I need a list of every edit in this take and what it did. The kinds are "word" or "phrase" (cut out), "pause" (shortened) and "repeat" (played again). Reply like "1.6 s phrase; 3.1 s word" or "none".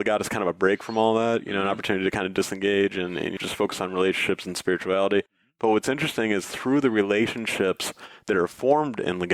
3.4 s phrase